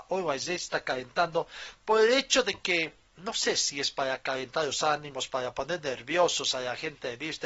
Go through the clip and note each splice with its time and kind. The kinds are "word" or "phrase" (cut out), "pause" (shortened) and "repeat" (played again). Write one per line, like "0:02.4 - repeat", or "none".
none